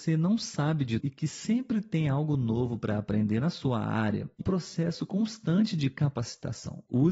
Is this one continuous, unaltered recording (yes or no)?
no